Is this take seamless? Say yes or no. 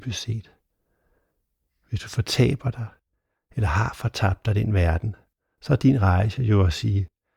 yes